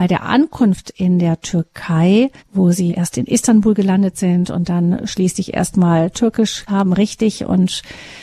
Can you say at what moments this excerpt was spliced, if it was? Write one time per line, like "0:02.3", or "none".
0:02.4
0:02.9
0:06.7